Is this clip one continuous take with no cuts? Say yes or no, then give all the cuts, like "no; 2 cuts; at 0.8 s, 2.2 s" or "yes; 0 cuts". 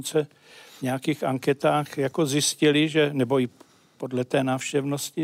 yes; 0 cuts